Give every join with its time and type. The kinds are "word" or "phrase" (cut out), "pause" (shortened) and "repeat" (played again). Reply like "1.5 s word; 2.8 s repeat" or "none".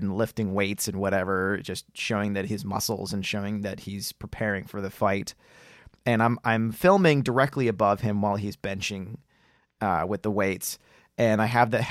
none